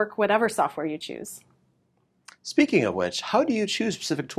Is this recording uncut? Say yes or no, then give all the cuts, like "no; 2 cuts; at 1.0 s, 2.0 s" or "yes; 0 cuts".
yes; 0 cuts